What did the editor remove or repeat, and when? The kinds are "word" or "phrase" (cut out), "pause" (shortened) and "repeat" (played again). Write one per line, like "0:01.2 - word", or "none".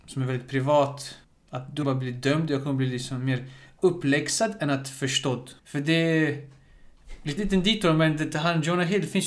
0:01.2 - pause
0:01.8 - phrase
0:05.6 - pause
0:07.4 - word